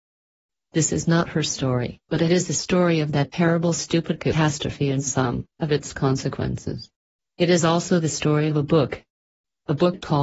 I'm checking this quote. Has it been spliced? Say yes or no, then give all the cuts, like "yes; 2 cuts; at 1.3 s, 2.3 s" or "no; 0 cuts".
yes; 3 cuts; at 2.0 s, 5.5 s, 7.2 s